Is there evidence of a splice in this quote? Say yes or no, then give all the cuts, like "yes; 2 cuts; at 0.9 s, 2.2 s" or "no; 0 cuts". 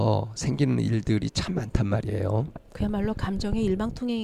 yes; 1 cut; at 2.7 s